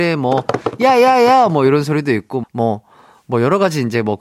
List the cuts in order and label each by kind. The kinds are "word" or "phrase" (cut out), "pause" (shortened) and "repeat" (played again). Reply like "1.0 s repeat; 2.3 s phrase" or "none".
2.4 s word